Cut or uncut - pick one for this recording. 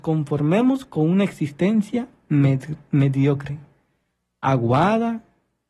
uncut